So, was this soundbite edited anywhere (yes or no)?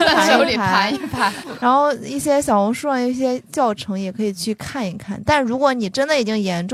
yes